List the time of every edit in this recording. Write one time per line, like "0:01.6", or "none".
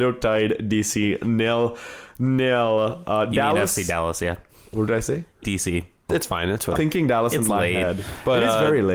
0:04.9
0:05.4
0:06.1
0:06.8